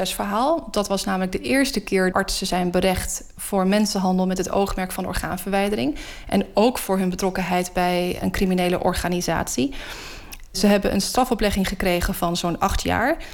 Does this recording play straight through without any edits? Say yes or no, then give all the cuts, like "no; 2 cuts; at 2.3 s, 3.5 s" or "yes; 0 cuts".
no; 1 cut; at 2.1 s